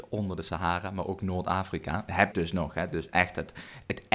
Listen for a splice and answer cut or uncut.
cut